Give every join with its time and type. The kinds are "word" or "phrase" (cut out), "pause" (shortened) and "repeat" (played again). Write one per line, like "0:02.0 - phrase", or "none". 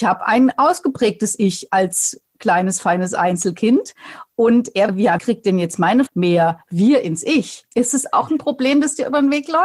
0:04.9 - phrase
0:05.2 - word
0:06.1 - word
0:07.7 - pause